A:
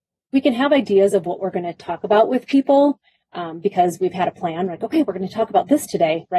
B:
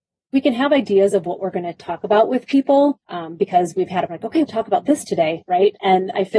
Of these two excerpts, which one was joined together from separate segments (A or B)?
B